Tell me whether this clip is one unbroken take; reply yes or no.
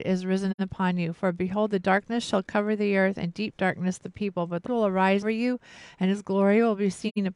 no